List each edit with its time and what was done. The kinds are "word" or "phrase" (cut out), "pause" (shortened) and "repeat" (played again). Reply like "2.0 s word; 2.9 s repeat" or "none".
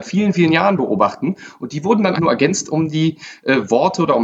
2.2 s word